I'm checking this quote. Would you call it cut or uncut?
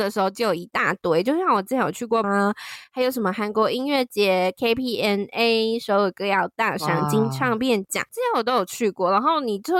cut